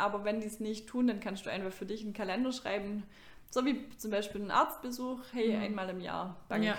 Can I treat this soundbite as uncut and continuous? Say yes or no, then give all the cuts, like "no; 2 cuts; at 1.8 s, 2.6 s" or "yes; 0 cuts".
yes; 0 cuts